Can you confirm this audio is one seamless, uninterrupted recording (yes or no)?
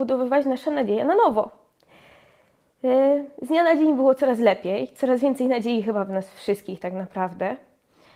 yes